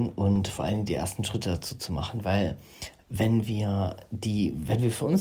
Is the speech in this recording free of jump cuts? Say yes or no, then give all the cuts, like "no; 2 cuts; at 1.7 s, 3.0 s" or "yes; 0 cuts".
yes; 0 cuts